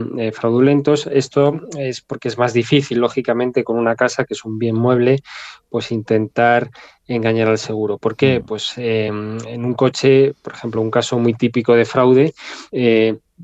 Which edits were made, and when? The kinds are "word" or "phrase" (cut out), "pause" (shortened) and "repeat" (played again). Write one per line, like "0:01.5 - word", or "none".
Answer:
none